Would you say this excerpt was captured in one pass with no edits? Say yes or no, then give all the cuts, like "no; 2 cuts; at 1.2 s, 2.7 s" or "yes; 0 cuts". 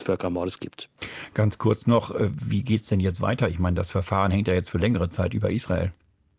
yes; 0 cuts